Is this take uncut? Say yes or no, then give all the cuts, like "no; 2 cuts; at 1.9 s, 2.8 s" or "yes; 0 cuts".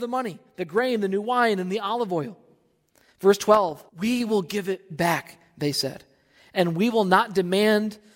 no; 1 cut; at 3.9 s